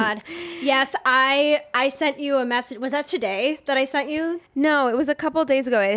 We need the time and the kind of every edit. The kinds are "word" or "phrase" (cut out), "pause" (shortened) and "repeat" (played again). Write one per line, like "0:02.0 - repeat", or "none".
0:04.5 - pause